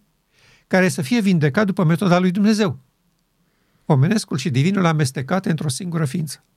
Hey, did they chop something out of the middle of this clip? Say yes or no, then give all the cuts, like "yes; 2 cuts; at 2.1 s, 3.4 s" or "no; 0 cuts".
no; 0 cuts